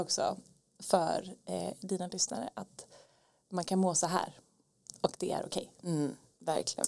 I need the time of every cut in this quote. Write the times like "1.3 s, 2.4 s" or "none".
none